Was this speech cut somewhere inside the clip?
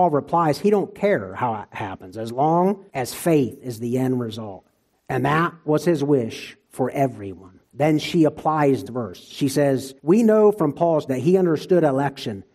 yes; 6 cuts; at 2.9 s, 4.9 s, 7.7 s, 8.9 s, 10.0 s, 11.1 s

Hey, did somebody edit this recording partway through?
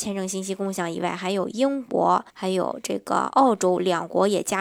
yes; 1 cut; at 2.3 s

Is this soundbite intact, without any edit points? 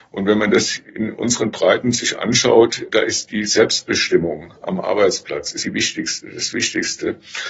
no; 1 cut; at 5.6 s

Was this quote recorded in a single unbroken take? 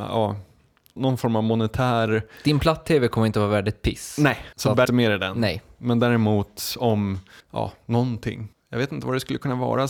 no; 5 cuts; at 1.0 s, 4.5 s, 4.9 s, 7.4 s, 8.5 s

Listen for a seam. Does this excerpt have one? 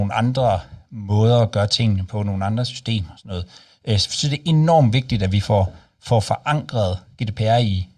no; 0 cuts

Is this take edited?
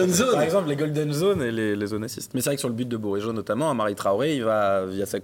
no; 0 cuts

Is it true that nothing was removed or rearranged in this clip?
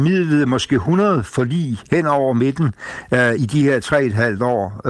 no; 1 cut; at 3.4 s

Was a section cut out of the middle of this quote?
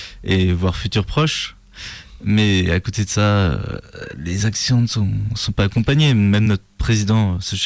no; 0 cuts

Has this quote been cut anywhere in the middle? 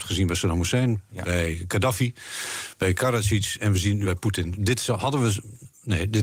yes; 1 cut; at 4.0 s

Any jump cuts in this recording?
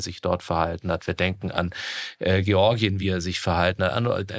no; 0 cuts

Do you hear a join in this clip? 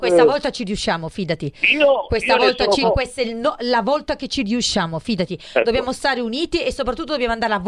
yes; 1 cut; at 2.8 s

